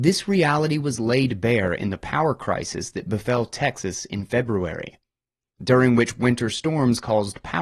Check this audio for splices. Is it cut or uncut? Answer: uncut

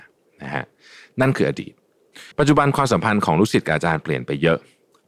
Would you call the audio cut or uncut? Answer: cut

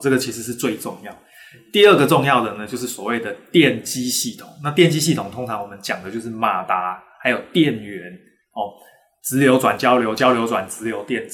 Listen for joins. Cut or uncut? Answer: uncut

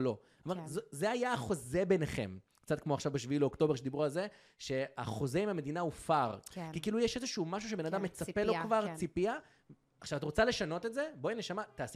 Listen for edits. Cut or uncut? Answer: uncut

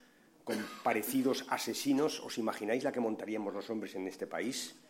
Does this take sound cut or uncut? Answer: uncut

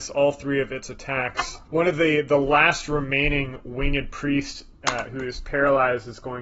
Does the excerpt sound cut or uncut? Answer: uncut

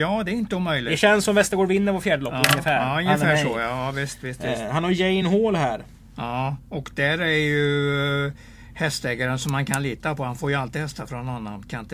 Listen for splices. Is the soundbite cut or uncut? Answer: uncut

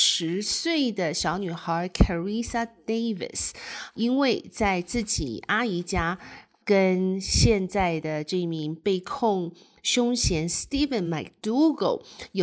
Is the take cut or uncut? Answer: uncut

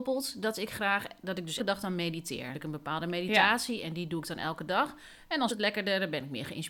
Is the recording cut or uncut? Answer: cut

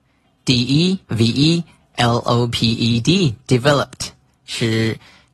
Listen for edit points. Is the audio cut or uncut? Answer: cut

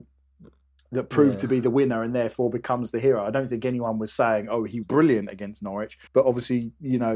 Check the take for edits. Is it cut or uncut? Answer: cut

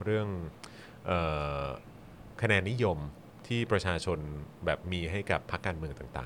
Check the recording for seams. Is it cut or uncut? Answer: uncut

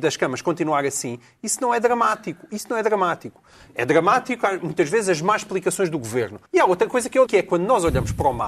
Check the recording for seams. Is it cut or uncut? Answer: cut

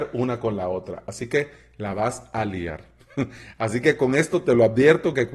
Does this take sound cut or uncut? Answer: uncut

